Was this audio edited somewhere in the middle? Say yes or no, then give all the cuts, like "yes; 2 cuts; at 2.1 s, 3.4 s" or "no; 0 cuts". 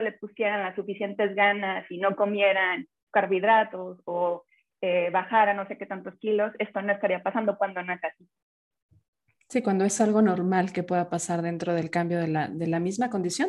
no; 0 cuts